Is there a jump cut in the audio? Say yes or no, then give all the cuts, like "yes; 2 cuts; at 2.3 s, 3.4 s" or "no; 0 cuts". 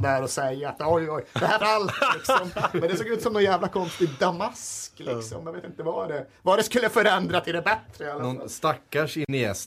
yes; 1 cut; at 1.6 s